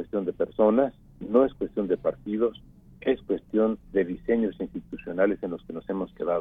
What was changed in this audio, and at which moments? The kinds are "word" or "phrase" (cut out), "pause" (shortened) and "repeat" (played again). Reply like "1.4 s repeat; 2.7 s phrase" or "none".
1.0 s pause; 3.8 s pause